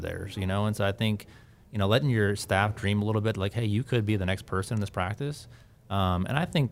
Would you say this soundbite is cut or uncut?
uncut